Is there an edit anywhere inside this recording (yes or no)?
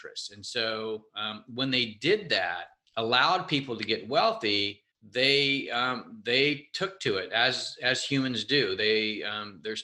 yes